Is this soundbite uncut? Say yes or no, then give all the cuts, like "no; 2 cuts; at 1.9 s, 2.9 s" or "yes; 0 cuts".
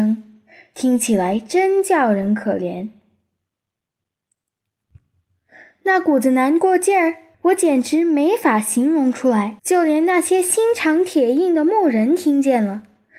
no; 2 cuts; at 7.3 s, 9.6 s